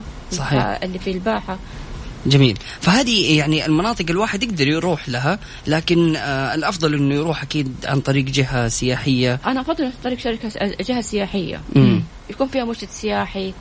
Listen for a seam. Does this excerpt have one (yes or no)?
no